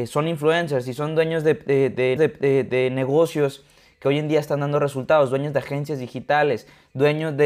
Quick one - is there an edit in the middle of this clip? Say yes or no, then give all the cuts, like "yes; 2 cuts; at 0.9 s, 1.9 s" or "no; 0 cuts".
yes; 1 cut; at 2.2 s